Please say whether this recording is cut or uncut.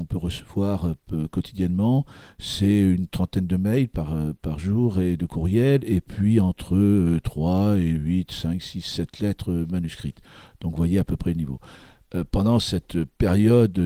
uncut